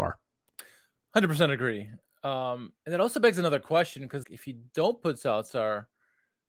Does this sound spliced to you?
yes; 1 cut; at 4.2 s

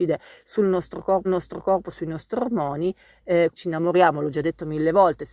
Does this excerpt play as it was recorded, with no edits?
no; 2 cuts; at 1.2 s, 3.5 s

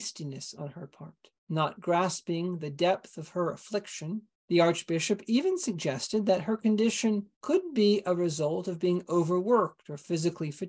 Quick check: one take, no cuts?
no; 3 cuts; at 1.4 s, 4.3 s, 7.4 s

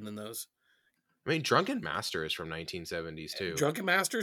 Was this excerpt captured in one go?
yes; 0 cuts

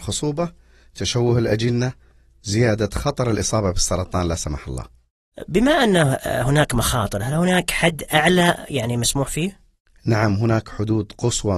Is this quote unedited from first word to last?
yes; 0 cuts

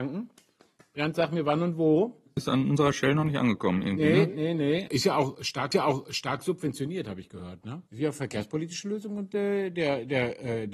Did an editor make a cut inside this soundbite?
yes; 3 cuts; at 4.9 s, 5.7 s, 7.9 s

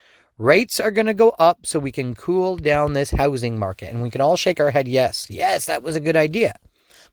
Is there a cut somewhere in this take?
no; 0 cuts

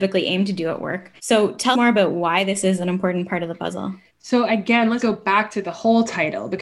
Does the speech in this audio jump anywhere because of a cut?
yes; 4 cuts; at 1.2 s, 1.7 s, 4.1 s, 5.0 s

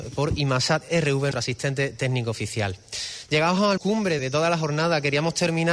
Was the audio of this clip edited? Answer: yes; 3 cuts; at 1.3 s, 3.8 s, 4.2 s

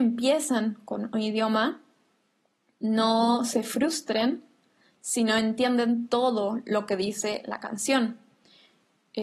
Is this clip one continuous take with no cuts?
yes; 0 cuts

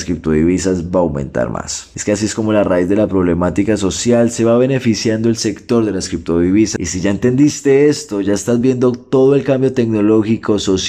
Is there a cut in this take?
no; 0 cuts

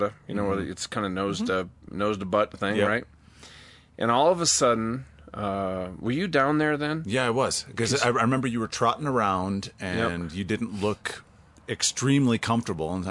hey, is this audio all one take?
no; 2 cuts; at 2.5 s, 11.5 s

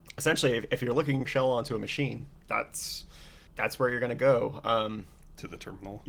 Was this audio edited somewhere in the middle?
yes; 2 cuts; at 1.3 s, 3.5 s

